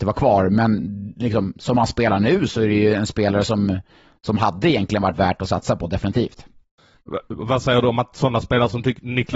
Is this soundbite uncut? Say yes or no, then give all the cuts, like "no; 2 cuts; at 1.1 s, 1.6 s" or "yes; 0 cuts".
yes; 0 cuts